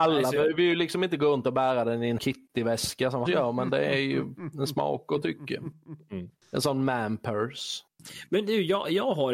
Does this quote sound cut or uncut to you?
cut